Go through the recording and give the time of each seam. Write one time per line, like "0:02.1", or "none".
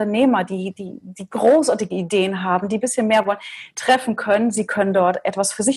none